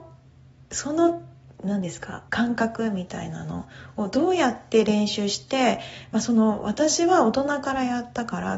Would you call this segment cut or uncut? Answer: cut